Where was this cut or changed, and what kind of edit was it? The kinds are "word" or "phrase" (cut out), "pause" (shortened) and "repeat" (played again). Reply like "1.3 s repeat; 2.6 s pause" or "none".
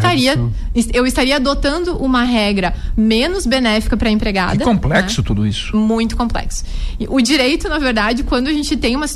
none